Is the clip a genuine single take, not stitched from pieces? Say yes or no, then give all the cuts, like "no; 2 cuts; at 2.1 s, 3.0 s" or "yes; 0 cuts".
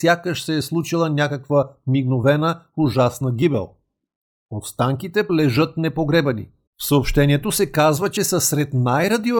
no; 3 cuts; at 5.3 s, 6.7 s, 8.2 s